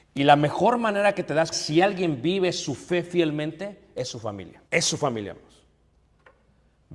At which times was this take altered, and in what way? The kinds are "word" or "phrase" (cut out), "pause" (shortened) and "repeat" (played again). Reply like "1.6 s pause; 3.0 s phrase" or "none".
1.5 s word; 4.7 s pause